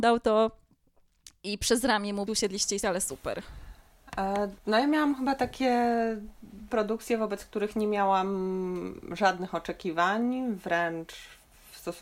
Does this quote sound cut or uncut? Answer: cut